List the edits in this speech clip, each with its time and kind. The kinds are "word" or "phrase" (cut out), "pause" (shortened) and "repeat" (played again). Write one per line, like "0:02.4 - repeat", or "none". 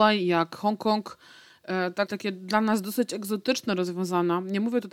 0:02.1 - word